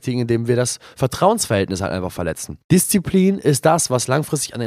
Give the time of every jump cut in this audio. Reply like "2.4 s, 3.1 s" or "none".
2.6 s